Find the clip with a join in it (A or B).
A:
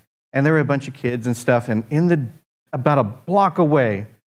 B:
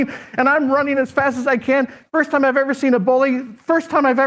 A